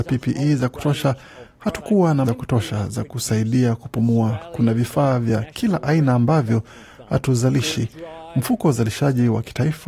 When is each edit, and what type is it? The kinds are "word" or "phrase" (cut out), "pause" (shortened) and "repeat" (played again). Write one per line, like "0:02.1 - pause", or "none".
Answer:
0:02.2 - word